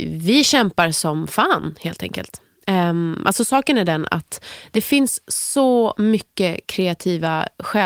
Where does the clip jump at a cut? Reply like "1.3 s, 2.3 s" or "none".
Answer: none